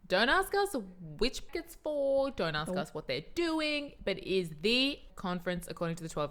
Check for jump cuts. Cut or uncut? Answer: cut